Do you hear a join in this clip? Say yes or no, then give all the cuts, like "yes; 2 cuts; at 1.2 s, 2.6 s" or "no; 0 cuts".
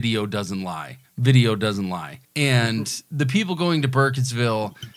yes; 2 cuts; at 1.1 s, 2.2 s